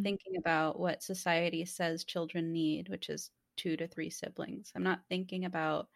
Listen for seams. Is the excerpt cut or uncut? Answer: uncut